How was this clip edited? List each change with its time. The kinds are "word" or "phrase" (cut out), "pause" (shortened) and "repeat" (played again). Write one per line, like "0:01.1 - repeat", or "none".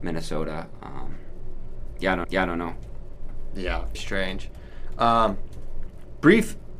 0:02.2 - repeat
0:03.9 - word